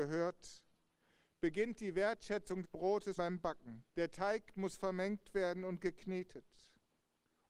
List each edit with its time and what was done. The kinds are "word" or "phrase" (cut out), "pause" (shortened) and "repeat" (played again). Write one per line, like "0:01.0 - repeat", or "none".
0:02.6 - word
0:03.2 - word
0:03.9 - pause